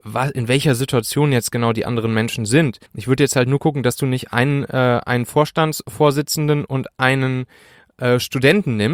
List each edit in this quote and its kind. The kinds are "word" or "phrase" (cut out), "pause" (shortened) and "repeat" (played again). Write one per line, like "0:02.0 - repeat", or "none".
0:02.9 - pause